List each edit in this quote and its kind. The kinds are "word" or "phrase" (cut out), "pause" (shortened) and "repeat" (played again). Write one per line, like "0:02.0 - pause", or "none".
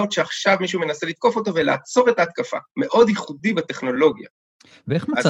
0:02.7 - pause